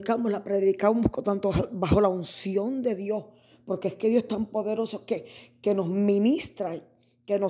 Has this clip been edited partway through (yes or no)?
no